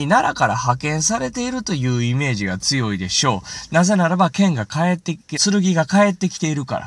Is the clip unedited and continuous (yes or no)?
no